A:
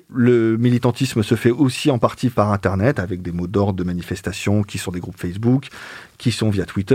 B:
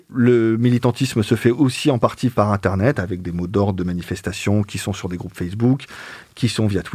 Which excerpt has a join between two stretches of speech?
A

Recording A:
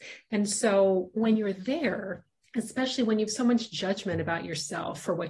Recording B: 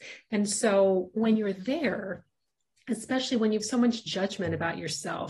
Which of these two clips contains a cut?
A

